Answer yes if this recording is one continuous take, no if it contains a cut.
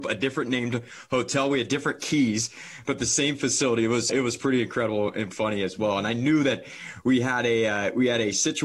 no